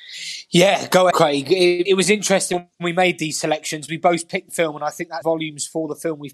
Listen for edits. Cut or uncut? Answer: cut